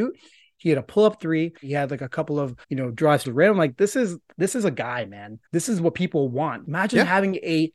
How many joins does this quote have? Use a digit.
5